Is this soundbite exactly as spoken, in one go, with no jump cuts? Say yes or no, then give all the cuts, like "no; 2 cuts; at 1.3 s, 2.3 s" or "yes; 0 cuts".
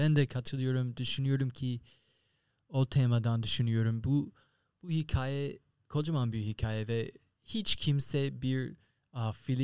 yes; 0 cuts